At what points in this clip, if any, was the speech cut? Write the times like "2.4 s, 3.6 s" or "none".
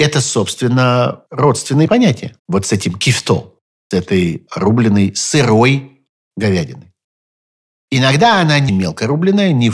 2.4 s, 3.9 s, 8.7 s